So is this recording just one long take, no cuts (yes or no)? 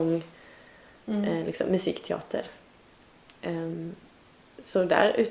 yes